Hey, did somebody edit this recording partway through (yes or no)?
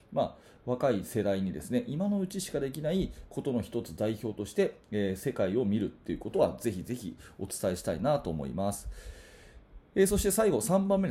no